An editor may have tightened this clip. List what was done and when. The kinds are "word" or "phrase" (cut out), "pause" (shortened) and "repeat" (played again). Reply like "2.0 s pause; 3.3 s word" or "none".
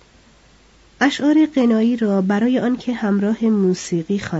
none